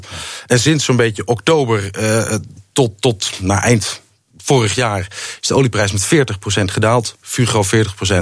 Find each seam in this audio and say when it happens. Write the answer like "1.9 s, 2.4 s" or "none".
none